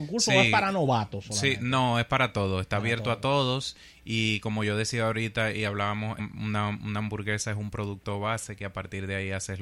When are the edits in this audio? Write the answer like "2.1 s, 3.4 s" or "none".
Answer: 6.2 s